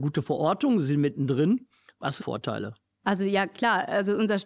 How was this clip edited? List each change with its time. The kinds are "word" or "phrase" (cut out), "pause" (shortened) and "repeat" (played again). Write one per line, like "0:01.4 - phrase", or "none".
0:02.2 - phrase

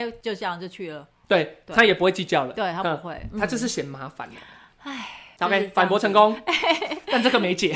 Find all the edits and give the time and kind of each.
none

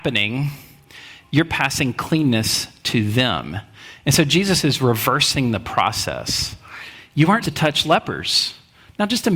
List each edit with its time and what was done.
0:07.4 - word

